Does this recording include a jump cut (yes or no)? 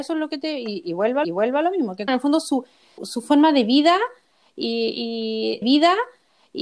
yes